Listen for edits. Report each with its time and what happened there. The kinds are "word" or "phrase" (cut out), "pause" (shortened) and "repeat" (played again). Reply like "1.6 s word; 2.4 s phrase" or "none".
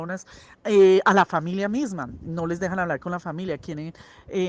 none